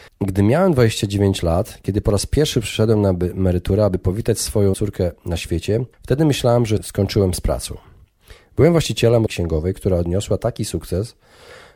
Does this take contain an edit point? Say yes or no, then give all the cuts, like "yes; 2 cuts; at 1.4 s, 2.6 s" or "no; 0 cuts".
yes; 3 cuts; at 4.7 s, 5.9 s, 9.3 s